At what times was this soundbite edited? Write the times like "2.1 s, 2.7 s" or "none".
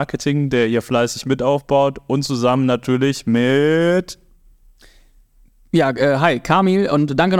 none

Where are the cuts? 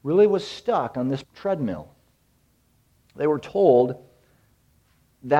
1.2 s

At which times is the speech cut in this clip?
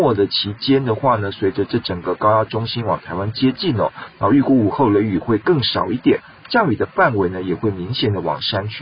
none

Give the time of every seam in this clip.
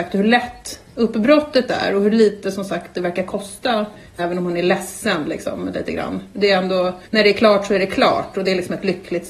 4.2 s, 7.1 s

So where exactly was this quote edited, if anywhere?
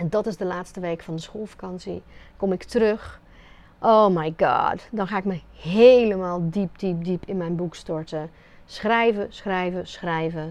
none

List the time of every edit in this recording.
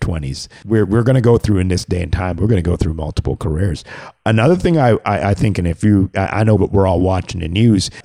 6.6 s

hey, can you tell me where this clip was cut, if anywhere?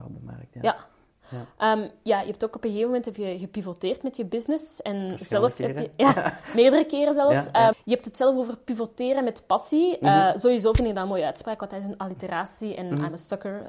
7.7 s

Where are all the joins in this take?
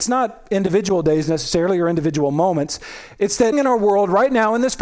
3.5 s

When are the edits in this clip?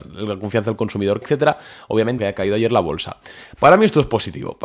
1.2 s, 2.2 s

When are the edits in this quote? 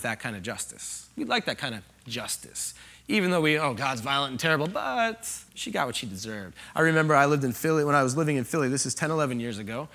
5.5 s

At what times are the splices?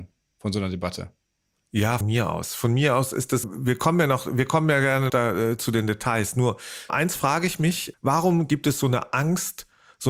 2.0 s, 3.4 s, 5.1 s, 6.9 s, 7.9 s

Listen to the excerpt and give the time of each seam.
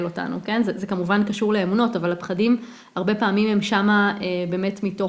none

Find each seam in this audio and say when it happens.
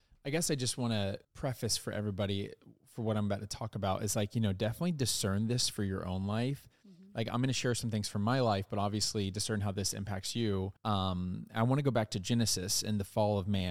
1.2 s, 10.8 s

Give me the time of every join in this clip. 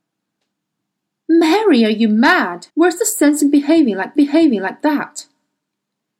2.7 s, 4.2 s

